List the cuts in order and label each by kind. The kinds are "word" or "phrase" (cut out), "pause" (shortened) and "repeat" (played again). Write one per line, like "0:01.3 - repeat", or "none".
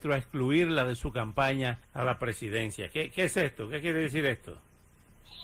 0:01.8 - pause